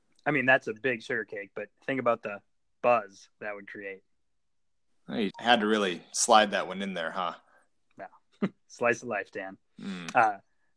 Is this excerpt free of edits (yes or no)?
no